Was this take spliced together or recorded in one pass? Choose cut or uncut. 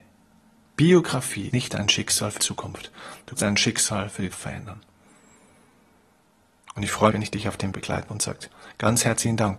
cut